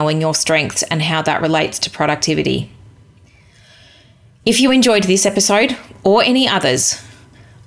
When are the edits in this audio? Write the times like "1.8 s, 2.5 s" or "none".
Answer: none

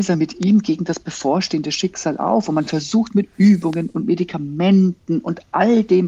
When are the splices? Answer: none

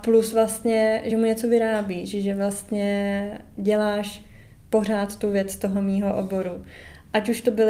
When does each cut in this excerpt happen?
none

